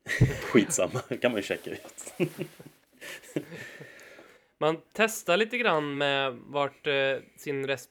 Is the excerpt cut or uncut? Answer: uncut